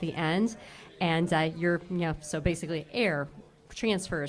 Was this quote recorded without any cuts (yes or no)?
yes